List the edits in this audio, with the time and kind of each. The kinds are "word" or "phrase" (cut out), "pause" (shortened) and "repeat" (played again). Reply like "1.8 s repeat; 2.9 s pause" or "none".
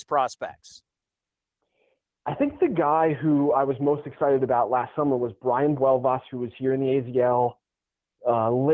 none